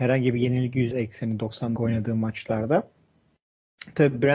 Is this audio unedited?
no; 2 cuts; at 0.9 s, 1.8 s

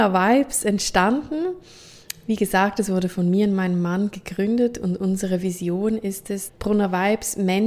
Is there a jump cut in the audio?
yes; 1 cut; at 6.5 s

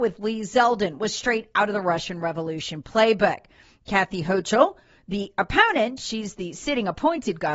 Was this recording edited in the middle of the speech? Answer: no; 0 cuts

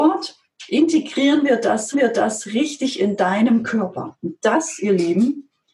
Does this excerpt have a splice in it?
yes; 1 cut; at 1.9 s

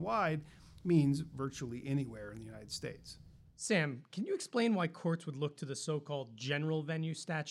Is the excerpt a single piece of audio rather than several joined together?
yes; 0 cuts

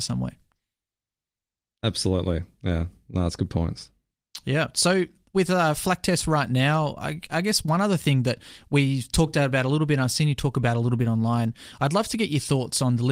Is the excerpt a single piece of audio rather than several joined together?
yes; 0 cuts

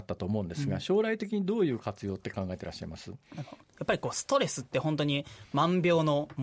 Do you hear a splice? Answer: no; 0 cuts

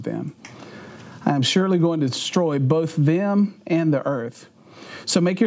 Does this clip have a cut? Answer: no; 0 cuts

